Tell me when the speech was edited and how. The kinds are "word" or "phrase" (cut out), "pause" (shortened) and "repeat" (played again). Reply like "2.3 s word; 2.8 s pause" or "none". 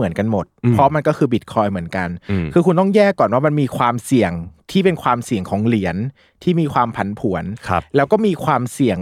none